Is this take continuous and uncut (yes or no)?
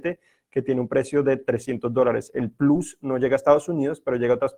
yes